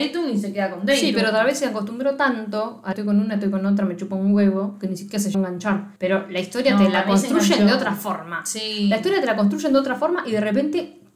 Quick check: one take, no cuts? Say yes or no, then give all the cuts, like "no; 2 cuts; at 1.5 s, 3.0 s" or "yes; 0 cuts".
no; 3 cuts; at 2.9 s, 5.3 s, 6.0 s